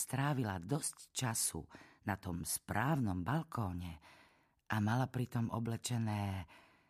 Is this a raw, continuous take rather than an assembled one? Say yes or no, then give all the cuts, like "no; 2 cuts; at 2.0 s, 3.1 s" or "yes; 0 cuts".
yes; 0 cuts